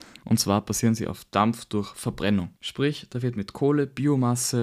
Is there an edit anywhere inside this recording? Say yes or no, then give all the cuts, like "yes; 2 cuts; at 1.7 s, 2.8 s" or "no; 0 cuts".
yes; 1 cut; at 2.6 s